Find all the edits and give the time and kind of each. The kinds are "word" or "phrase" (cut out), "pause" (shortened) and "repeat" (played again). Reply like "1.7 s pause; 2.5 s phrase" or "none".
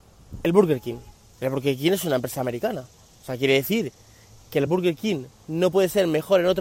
none